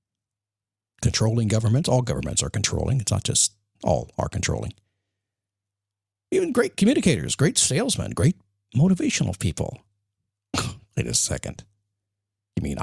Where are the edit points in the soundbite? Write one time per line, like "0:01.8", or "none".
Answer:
0:03.8